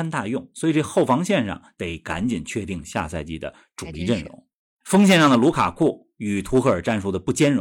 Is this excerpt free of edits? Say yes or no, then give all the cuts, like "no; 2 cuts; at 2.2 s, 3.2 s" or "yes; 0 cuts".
yes; 0 cuts